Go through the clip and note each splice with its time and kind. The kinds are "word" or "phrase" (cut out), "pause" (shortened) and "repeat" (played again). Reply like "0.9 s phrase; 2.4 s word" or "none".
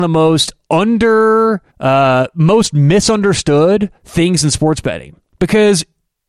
1.7 s pause; 4.0 s pause